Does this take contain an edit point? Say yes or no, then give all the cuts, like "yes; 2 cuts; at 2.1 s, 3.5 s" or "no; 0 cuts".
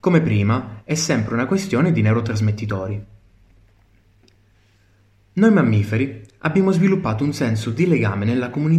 no; 0 cuts